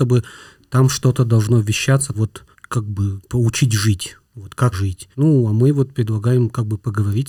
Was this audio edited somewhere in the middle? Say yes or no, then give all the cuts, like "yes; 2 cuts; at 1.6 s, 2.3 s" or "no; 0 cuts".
yes; 6 cuts; at 2.1 s, 2.5 s, 3.3 s, 4.2 s, 4.7 s, 5.1 s